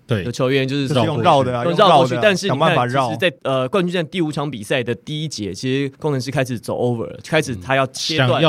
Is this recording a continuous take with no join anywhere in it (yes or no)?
yes